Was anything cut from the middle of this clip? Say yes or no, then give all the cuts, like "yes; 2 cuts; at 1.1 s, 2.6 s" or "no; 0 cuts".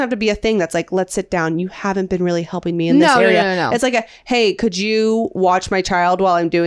no; 0 cuts